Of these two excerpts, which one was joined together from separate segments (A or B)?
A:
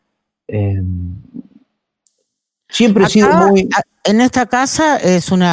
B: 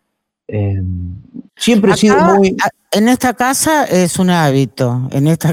B